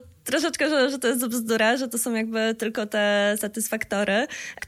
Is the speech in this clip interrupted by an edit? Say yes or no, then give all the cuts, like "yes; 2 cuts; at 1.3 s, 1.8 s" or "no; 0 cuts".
no; 0 cuts